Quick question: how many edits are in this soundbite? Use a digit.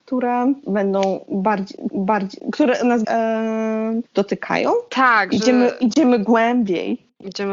3